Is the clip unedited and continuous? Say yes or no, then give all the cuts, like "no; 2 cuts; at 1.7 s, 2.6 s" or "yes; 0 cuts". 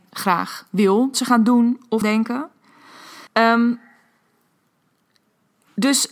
no; 3 cuts; at 1.1 s, 2.0 s, 3.3 s